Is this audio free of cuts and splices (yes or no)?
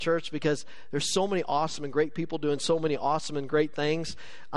yes